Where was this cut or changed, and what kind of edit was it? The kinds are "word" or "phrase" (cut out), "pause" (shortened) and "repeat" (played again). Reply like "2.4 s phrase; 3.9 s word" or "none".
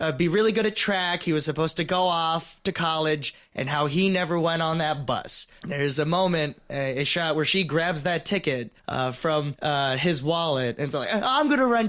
8.8 s pause